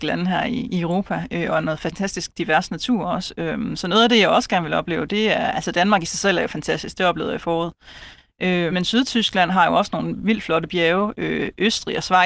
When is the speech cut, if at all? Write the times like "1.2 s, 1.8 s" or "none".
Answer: 8.7 s